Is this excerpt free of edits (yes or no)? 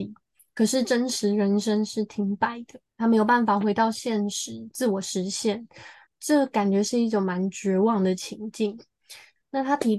no